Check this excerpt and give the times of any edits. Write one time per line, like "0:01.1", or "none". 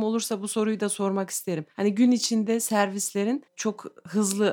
0:03.5